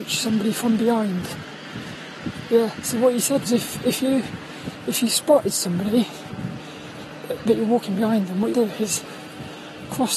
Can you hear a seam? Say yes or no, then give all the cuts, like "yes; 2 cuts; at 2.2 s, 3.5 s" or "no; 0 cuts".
yes; 2 cuts; at 3.4 s, 8.5 s